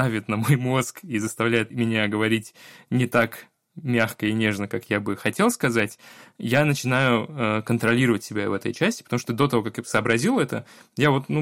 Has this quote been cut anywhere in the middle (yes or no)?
no